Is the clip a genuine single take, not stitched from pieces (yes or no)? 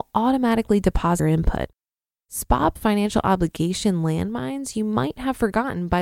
no